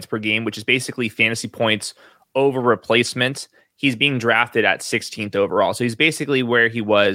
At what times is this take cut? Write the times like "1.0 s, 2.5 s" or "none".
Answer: none